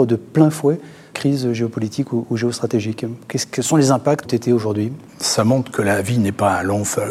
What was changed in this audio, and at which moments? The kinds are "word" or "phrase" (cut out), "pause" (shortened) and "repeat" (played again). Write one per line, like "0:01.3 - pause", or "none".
0:01.1 - word
0:04.2 - phrase
0:05.1 - pause